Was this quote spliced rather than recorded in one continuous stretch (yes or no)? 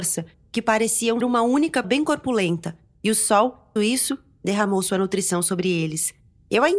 yes